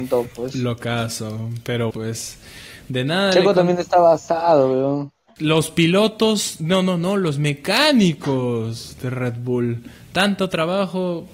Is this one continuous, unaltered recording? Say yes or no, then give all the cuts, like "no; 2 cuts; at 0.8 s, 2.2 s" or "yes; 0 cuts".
no; 1 cut; at 1.9 s